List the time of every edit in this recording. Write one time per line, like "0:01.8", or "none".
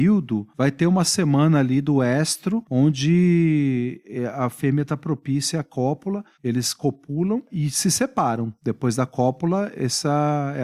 none